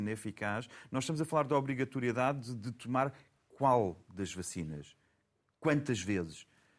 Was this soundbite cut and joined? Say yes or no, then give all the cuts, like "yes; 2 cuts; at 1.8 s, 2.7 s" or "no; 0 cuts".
no; 0 cuts